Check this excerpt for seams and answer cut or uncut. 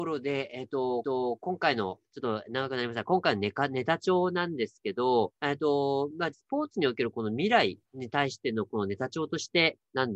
cut